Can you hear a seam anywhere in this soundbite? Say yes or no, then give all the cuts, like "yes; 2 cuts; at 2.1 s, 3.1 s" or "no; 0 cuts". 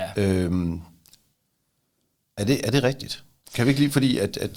no; 0 cuts